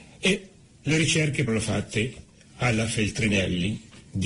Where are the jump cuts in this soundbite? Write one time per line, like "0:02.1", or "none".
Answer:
0:01.5